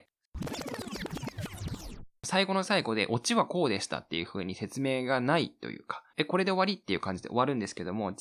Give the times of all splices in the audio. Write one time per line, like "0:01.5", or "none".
0:02.2
0:06.1

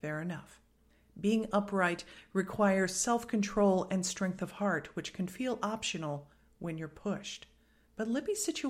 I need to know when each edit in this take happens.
none

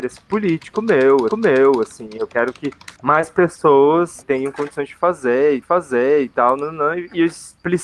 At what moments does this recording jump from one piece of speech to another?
0:01.3
0:02.9
0:04.2
0:05.6

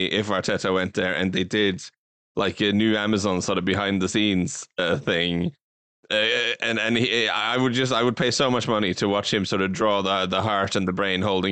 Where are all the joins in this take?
none

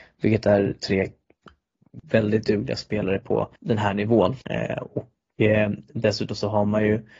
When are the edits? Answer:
0:02.0
0:03.6
0:04.4

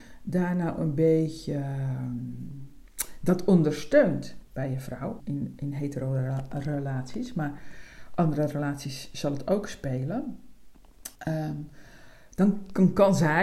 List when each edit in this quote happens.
0:04.4
0:05.2
0:11.2

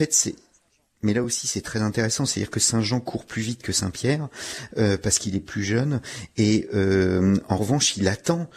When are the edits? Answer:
none

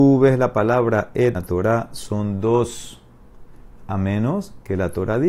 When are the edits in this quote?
0:01.3

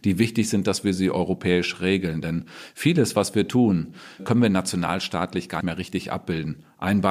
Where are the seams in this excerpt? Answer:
0:04.2
0:05.6

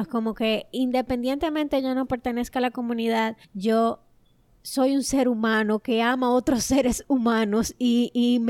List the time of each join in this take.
0:03.4

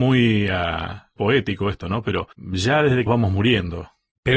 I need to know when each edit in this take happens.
0:01.2
0:02.3
0:03.1

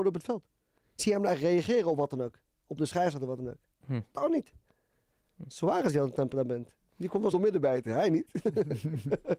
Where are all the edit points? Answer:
0:01.0
0:02.8
0:07.3

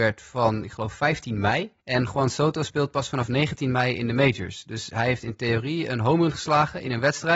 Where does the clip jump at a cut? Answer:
0:01.8

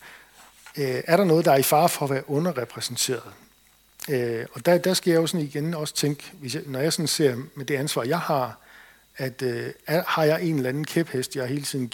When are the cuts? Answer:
none

